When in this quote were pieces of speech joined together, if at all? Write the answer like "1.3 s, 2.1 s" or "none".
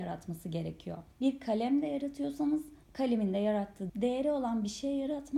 1.1 s, 2.8 s, 3.9 s